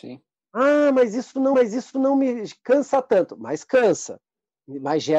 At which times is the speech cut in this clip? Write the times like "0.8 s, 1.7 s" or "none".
1.5 s